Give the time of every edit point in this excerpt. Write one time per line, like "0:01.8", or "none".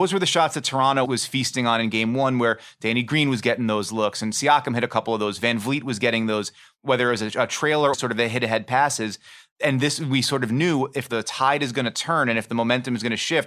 0:01.0
0:07.9